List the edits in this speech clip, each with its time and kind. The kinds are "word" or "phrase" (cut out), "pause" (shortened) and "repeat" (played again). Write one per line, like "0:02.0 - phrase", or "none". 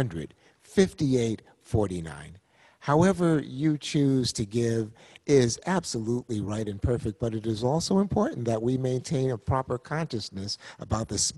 none